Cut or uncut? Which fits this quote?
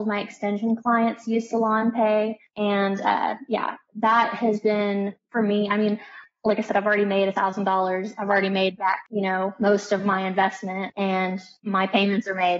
uncut